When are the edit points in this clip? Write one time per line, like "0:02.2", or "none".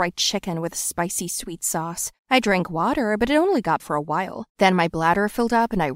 0:02.2
0:03.8
0:04.5